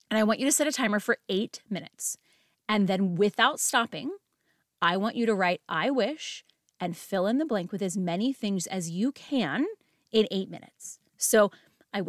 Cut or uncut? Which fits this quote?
uncut